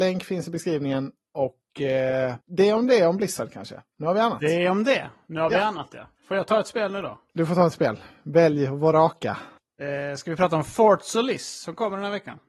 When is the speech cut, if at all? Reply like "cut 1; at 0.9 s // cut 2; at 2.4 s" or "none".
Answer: cut 1; at 2.4 s // cut 2; at 6.2 s // cut 3; at 9.6 s